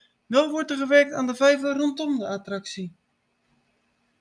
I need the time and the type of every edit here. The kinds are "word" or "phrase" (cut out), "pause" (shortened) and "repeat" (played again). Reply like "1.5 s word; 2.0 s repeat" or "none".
none